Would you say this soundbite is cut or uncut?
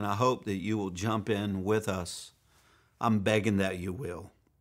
uncut